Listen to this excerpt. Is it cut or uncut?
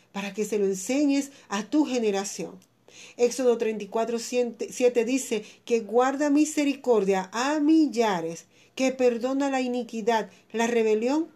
uncut